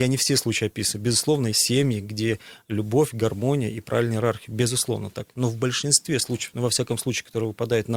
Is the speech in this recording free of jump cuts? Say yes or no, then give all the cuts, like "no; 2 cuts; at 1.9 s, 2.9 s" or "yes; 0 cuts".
no; 1 cut; at 1.5 s